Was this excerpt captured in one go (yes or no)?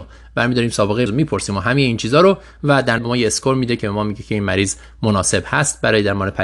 no